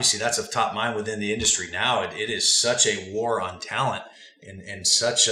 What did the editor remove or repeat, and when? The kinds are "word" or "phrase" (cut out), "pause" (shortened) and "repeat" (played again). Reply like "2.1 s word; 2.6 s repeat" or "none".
none